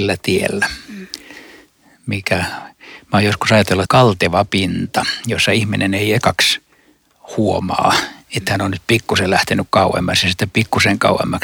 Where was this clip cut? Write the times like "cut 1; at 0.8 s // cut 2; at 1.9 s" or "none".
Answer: cut 1; at 3.9 s